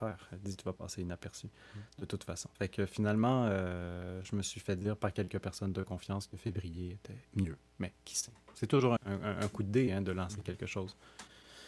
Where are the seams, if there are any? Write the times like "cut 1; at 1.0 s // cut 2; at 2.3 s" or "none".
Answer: cut 1; at 2.5 s // cut 2; at 7.2 s // cut 3; at 9.0 s